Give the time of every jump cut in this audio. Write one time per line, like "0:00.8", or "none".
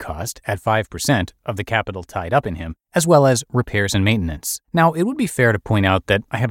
0:02.8
0:04.6

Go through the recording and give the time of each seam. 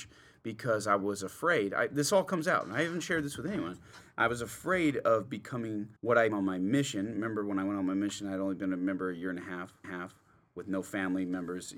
0:06.0
0:06.3
0:09.8

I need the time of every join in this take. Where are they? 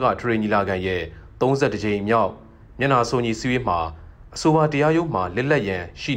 none

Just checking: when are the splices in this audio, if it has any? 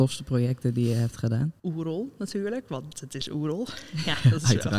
none

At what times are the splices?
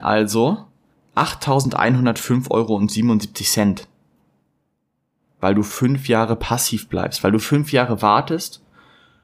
none

